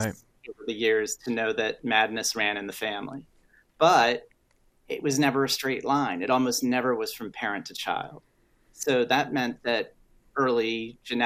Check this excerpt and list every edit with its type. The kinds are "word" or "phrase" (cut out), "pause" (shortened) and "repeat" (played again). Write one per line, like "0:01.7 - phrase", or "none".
none